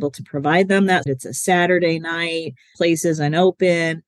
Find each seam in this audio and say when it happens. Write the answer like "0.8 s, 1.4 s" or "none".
1.0 s, 2.7 s